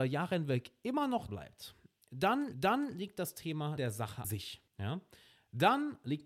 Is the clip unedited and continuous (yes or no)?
no